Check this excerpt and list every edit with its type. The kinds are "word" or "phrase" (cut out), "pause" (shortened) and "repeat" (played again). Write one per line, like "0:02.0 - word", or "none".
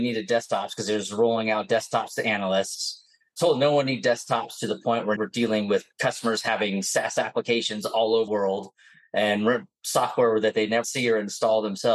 0:05.2 - word
0:05.9 - pause
0:08.3 - word
0:10.8 - word